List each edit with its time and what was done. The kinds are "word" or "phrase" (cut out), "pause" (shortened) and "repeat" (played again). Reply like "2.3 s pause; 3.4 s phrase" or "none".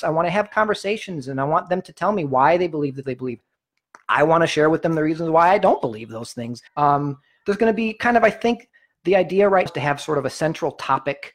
3.0 s word; 6.7 s pause; 9.7 s word